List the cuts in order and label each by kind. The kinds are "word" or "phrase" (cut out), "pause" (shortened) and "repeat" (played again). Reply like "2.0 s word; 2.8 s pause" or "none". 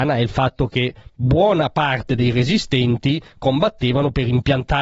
none